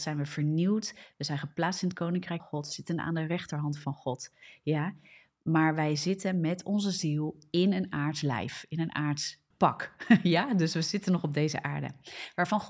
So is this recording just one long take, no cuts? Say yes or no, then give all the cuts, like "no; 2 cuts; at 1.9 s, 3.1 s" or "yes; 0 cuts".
no; 2 cuts; at 2.4 s, 9.5 s